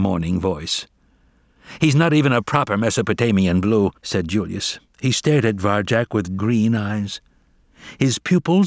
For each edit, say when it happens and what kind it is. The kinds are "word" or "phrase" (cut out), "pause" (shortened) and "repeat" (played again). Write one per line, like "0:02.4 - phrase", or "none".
0:04.0 - pause
0:04.9 - pause
0:06.4 - word